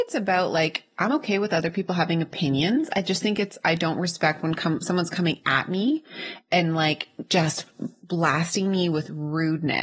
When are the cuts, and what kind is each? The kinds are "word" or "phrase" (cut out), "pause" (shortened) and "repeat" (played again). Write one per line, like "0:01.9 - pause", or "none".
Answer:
none